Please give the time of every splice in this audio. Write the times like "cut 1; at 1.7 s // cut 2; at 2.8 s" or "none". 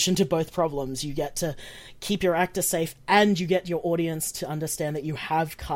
none